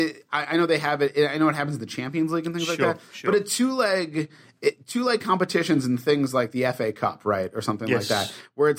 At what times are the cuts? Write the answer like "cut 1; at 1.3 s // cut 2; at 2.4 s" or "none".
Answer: none